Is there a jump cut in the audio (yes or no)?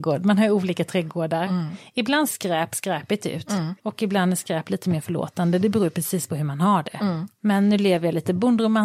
yes